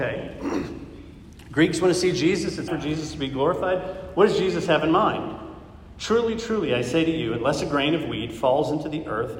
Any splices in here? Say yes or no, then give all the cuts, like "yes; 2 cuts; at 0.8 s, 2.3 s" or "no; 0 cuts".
yes; 1 cut; at 2.7 s